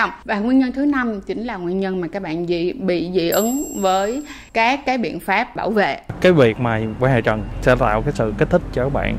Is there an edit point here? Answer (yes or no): yes